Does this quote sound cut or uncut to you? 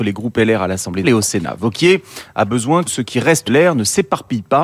cut